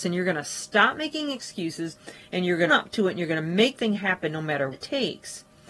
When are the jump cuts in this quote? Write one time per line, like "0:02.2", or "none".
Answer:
0:02.7
0:03.8
0:04.7